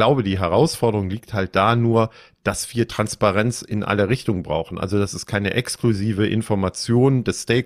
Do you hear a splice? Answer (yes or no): no